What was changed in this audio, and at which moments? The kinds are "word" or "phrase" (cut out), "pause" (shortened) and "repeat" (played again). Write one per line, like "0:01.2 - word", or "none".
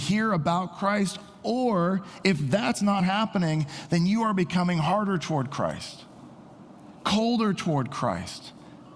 none